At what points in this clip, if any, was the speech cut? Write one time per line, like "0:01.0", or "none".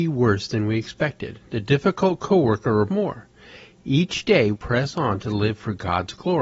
0:02.9
0:04.5